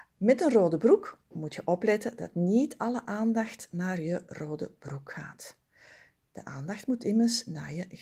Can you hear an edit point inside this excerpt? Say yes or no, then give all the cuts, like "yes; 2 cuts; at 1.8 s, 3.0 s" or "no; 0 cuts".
no; 0 cuts